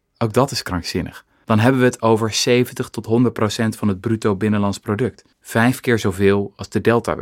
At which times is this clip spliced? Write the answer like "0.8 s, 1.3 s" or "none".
5.3 s